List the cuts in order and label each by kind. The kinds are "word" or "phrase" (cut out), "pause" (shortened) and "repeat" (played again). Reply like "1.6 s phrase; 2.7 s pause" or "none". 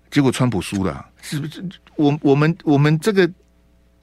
1.1 s pause